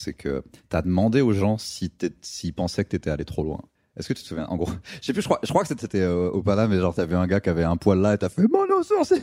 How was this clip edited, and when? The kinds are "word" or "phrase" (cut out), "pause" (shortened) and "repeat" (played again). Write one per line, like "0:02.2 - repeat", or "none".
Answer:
0:03.8 - pause
0:05.8 - word